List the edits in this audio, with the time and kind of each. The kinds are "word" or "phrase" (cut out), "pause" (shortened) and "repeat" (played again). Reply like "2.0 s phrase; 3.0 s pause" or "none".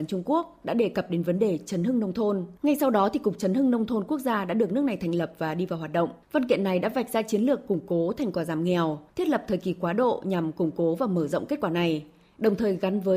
2.6 s pause; 6.2 s pause; 9.1 s pause